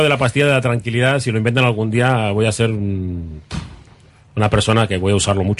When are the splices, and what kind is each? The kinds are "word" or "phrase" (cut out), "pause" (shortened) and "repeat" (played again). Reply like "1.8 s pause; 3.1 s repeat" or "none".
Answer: none